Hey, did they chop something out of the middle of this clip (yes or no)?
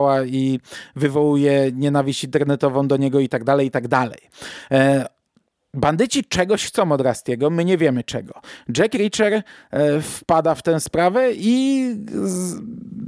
no